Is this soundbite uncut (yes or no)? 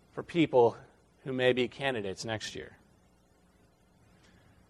yes